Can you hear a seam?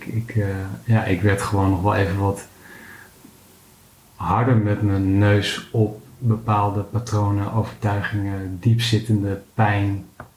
no; 0 cuts

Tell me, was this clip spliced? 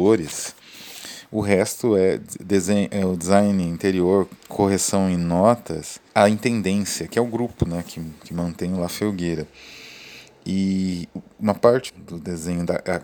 yes; 3 cuts; at 4.4 s, 6.1 s, 11.9 s

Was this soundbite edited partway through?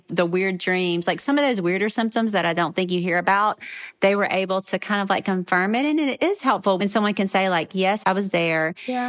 no; 0 cuts

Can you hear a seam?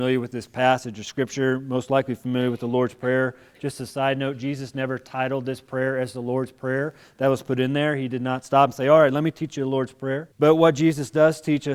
yes; 1 cut; at 10.3 s

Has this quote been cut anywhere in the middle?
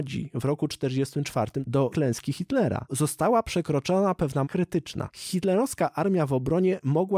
yes; 3 cuts; at 1.9 s, 2.9 s, 4.4 s

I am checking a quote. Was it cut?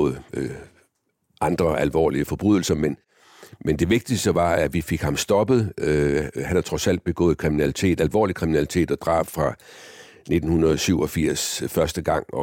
no; 0 cuts

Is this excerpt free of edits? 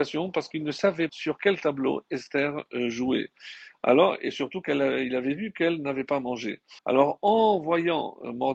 no; 2 cuts; at 1.1 s, 6.8 s

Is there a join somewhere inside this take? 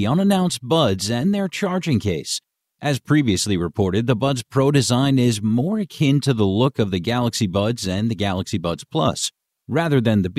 no; 0 cuts

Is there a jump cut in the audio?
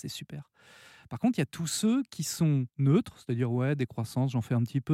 yes; 1 cut; at 2.7 s

